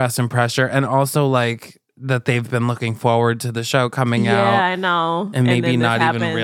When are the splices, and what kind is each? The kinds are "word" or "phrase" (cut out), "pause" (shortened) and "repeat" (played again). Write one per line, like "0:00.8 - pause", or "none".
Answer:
none